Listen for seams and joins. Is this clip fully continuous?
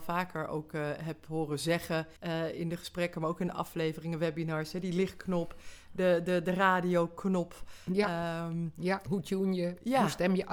no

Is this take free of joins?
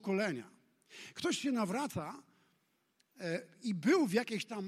yes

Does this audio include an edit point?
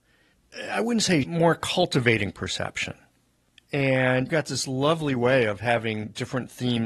yes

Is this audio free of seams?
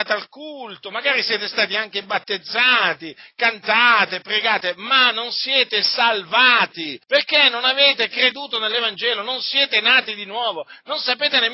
no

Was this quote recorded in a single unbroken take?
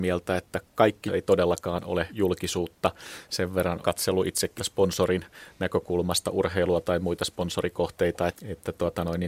no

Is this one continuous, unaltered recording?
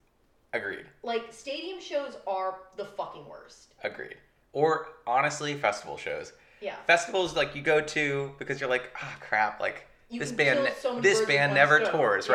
yes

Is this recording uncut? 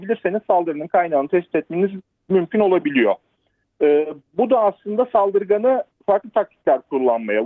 yes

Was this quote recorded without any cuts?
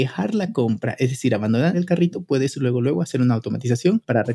yes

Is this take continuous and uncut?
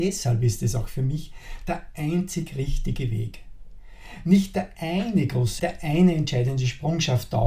no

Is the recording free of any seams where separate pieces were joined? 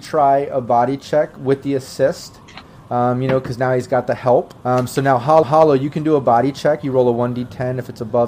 no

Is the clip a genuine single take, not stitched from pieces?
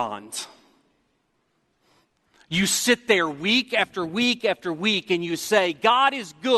yes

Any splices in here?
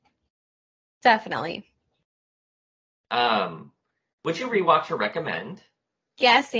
no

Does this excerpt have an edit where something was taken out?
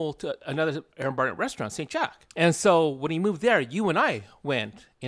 yes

